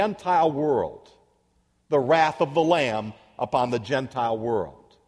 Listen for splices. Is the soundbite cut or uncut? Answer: uncut